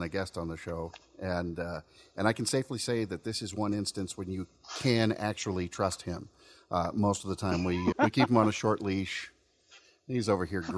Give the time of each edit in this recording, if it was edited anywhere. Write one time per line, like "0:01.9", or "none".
0:07.9